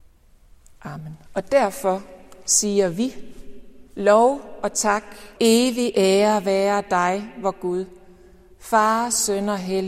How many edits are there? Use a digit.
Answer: 3